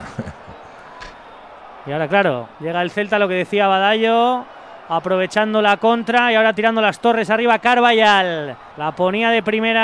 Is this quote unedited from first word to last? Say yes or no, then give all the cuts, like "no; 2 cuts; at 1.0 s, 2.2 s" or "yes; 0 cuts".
no; 2 cuts; at 2.5 s, 8.7 s